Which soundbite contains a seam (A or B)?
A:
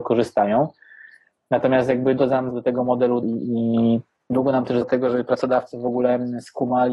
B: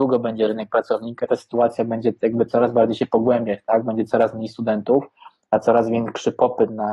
A